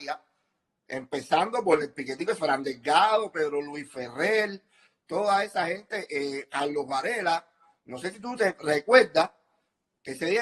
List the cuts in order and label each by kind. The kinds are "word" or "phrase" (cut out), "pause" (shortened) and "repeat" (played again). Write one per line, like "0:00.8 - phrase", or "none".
none